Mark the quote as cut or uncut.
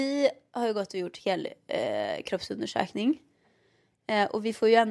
uncut